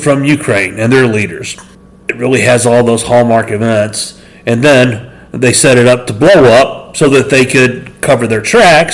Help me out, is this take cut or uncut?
uncut